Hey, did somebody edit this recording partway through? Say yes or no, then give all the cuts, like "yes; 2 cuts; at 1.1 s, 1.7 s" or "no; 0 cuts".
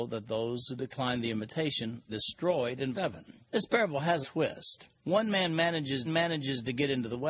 yes; 6 cuts; at 2.1 s, 2.9 s, 3.4 s, 4.2 s, 5.0 s, 6.0 s